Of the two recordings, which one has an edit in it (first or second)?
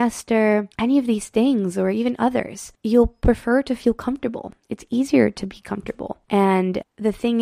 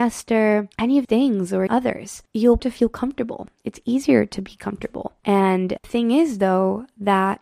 second